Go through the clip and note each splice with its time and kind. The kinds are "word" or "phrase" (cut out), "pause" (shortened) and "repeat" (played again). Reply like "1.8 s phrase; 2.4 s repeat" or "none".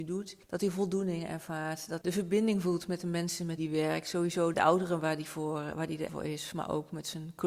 2.0 s word; 3.6 s word; 4.5 s word; 6.1 s word